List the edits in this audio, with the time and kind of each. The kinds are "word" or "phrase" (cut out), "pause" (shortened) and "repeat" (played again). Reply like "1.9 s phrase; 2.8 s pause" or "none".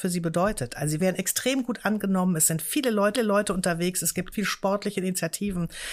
1.0 s phrase; 3.2 s repeat; 4.3 s word